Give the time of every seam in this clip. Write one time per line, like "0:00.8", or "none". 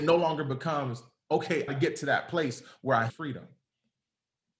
0:01.7
0:03.1